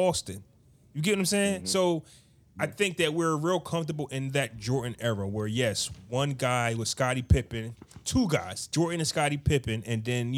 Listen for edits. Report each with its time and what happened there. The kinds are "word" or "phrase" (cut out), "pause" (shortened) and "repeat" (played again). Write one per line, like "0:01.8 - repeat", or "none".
none

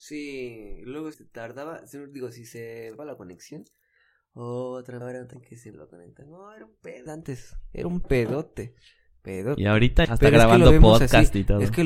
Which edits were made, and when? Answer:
0:01.1 - word
0:03.0 - word
0:05.0 - word
0:05.3 - word
0:05.7 - word
0:07.1 - word
0:10.0 - word

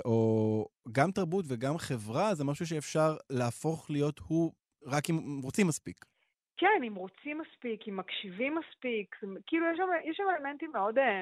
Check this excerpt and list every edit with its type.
none

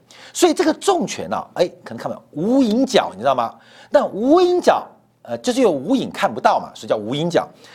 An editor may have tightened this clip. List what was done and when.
none

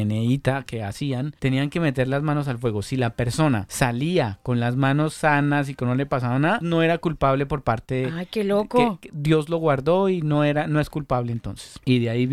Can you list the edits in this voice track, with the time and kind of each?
0:06.6 - word

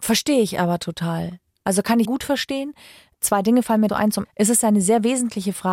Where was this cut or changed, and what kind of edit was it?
0:02.0 - word
0:03.9 - word
0:04.2 - word

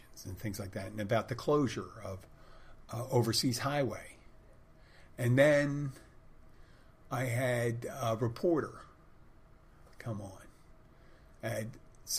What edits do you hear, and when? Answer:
none

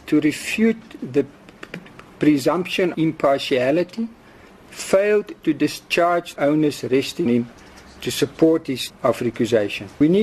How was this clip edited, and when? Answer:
0:02.9 - word
0:06.4 - word
0:07.3 - word
0:08.9 - word

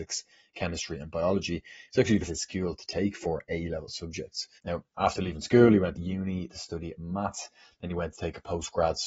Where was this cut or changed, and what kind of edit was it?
0:02.3 - phrase
0:04.6 - pause
0:05.9 - phrase

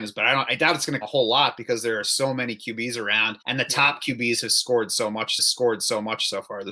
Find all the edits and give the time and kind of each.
0:01.0 - word
0:03.4 - pause
0:05.4 - repeat

